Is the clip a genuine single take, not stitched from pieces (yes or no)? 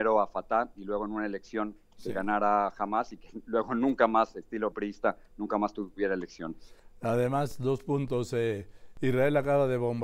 no